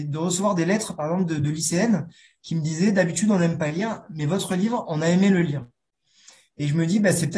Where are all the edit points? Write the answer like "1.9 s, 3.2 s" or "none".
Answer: none